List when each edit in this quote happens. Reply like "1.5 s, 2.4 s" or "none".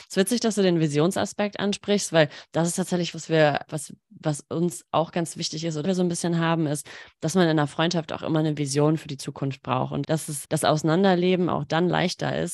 3.1 s, 3.7 s, 5.8 s, 10.0 s, 10.4 s

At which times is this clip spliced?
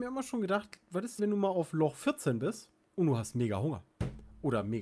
1.2 s, 2.8 s

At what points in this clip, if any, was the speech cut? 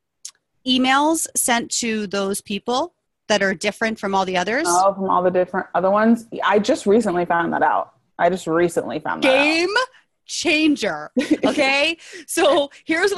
none

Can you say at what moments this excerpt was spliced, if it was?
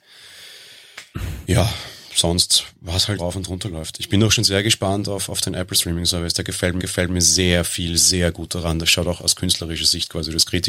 3.2 s, 6.8 s, 9.2 s

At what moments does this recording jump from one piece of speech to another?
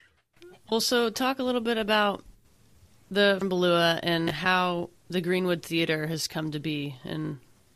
3.4 s, 5.0 s

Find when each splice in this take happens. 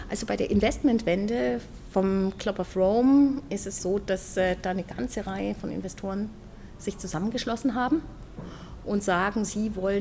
3.8 s

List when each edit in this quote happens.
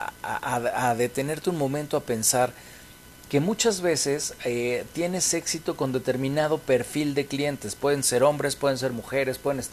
none

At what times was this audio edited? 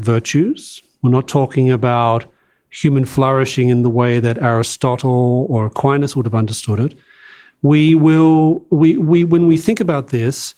none

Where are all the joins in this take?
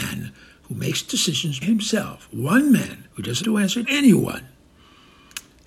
1.6 s, 3.1 s, 3.4 s, 3.8 s

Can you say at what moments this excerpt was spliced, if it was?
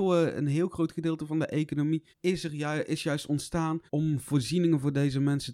2.1 s, 3.9 s

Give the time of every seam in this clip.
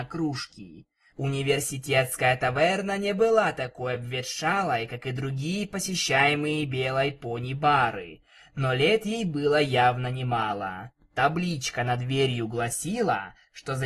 none

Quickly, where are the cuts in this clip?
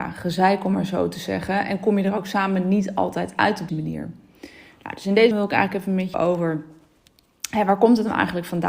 3.7 s, 5.3 s, 6.1 s

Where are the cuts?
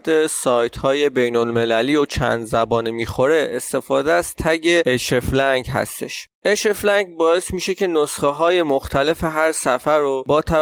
6.3 s

